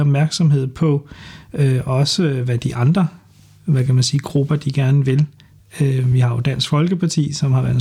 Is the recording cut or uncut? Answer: uncut